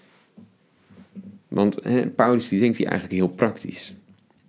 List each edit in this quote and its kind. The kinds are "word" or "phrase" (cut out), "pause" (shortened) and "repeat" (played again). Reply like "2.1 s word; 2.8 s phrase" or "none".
none